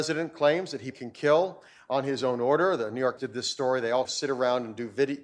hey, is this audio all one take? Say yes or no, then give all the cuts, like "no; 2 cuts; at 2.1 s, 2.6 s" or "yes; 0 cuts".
no; 3 cuts; at 0.9 s, 3.2 s, 4.0 s